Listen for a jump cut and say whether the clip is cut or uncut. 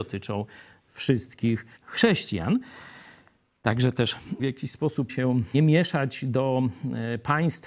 cut